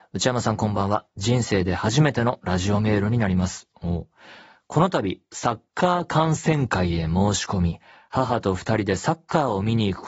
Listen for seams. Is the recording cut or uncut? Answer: uncut